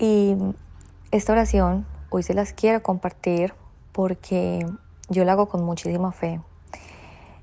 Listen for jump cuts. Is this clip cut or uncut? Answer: uncut